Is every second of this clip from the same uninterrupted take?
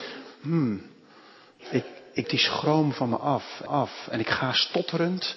no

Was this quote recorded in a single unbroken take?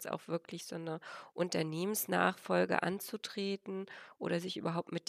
yes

